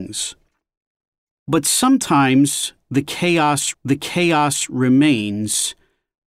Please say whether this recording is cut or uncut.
cut